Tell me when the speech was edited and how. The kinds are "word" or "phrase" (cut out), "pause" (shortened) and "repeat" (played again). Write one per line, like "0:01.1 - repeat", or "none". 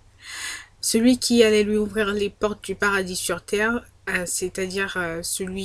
none